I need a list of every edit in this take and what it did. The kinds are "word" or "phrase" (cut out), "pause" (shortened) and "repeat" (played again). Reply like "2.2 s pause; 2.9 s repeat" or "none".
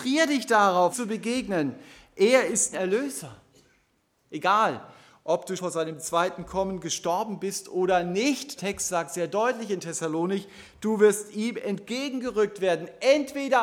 0.9 s word; 2.7 s word; 5.6 s word; 8.6 s word